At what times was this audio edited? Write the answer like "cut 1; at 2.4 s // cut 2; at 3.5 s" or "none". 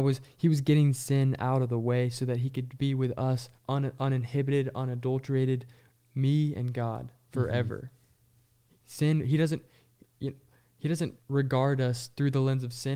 cut 1; at 3.6 s // cut 2; at 8.8 s // cut 3; at 11.2 s